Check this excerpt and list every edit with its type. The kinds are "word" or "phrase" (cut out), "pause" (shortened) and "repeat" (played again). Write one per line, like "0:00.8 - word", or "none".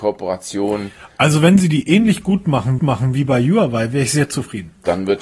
0:02.8 - repeat